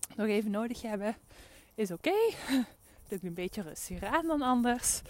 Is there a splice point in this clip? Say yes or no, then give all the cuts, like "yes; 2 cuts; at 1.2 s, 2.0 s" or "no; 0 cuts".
no; 0 cuts